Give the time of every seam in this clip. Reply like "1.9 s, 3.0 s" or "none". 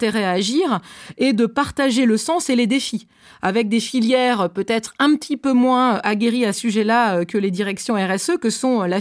6.5 s